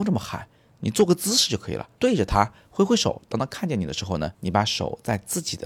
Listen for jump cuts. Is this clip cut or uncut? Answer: cut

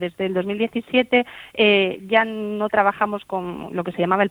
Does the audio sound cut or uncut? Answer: uncut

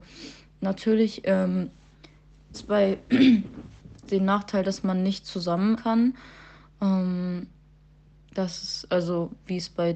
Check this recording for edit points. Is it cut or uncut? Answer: cut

